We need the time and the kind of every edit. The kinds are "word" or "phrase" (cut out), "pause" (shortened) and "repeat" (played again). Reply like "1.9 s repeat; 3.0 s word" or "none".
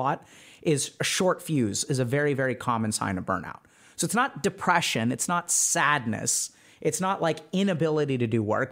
none